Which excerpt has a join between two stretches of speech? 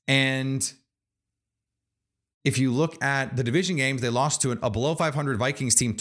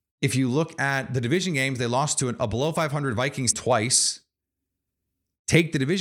second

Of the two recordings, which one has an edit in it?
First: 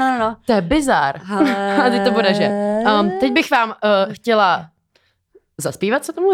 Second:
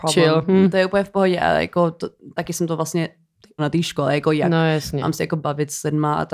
second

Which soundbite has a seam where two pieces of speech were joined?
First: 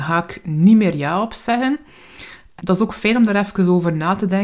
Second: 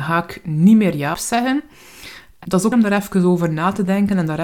second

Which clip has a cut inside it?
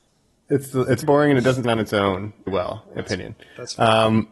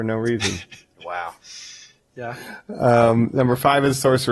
first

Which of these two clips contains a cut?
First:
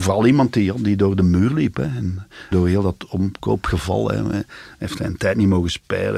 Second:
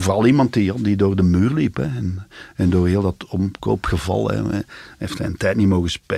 first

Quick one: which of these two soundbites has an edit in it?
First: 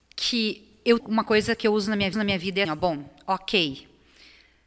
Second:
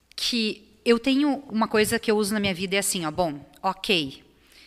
first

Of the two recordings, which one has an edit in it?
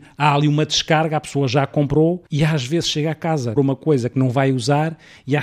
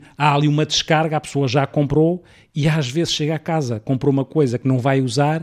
first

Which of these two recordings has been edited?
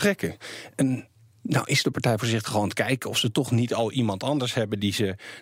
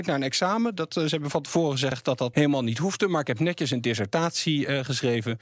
second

